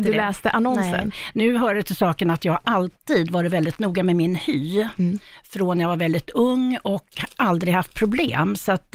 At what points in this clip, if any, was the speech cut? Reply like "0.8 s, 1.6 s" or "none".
none